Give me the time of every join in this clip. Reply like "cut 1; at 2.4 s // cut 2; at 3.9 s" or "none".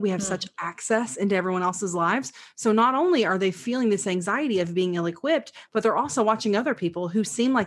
none